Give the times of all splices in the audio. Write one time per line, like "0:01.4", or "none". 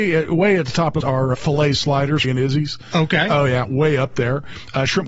0:01.0
0:01.3
0:02.2